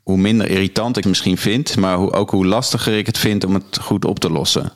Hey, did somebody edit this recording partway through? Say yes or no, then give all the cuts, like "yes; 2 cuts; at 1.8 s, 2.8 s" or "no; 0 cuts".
yes; 1 cut; at 1.0 s